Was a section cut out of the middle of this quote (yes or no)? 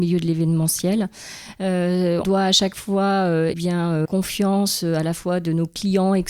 yes